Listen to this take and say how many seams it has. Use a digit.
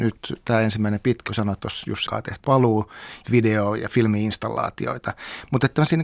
4